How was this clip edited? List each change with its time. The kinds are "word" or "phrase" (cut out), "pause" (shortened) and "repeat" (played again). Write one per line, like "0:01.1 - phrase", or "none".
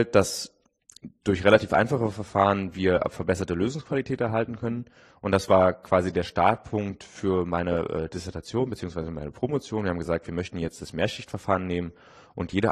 none